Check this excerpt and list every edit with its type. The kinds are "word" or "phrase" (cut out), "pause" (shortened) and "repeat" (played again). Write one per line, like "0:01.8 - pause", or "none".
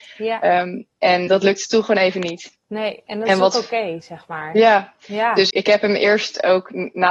0:01.3 - word
0:05.5 - word